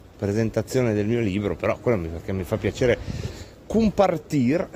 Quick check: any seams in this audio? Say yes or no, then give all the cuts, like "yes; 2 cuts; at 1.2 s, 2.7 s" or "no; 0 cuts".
no; 0 cuts